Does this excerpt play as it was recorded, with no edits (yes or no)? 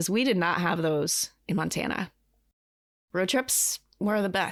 yes